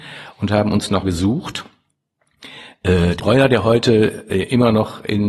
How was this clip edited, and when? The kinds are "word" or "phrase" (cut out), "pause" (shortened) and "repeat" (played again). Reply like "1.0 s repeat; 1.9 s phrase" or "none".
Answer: 1.0 s word; 3.2 s word